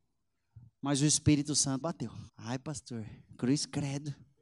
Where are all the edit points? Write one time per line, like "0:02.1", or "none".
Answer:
0:01.8
0:02.3